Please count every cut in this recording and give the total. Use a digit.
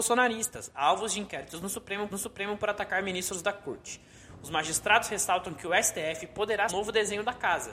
2